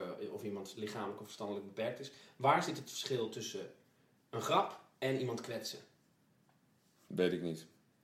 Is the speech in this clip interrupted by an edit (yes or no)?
no